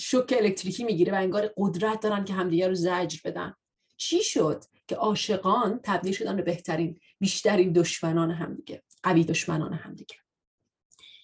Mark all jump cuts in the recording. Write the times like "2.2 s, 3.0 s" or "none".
9.3 s